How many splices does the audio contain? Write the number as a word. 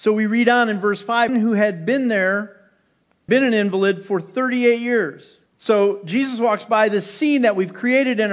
three